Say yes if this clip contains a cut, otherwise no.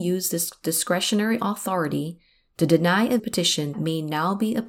yes